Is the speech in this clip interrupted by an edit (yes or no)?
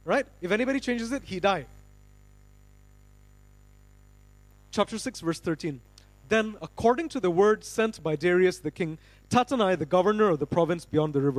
no